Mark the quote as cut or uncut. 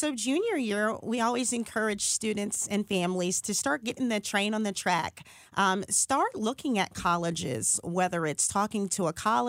uncut